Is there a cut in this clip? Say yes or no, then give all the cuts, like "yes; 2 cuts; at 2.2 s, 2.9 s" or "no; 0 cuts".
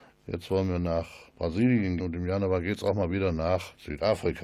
yes; 1 cut; at 2.0 s